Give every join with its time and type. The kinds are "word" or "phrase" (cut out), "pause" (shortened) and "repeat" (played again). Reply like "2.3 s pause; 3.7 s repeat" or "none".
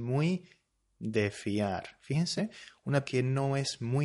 2.4 s phrase; 3.0 s word